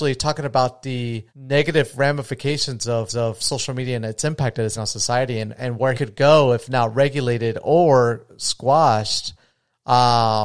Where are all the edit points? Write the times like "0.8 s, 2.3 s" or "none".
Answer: 1.3 s, 3.1 s, 4.8 s, 5.9 s